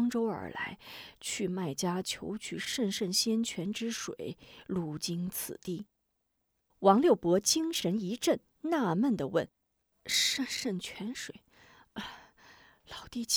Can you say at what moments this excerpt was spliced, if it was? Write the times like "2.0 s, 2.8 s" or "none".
9.5 s

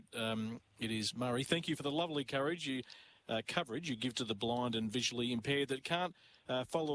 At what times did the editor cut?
none

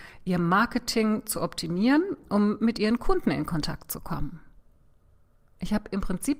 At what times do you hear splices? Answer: none

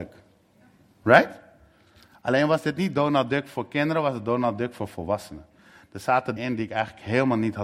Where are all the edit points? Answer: 6.4 s

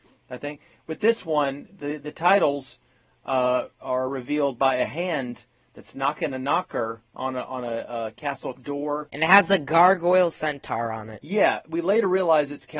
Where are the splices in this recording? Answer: none

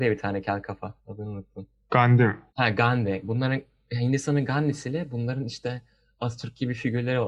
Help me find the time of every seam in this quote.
1.0 s, 2.5 s

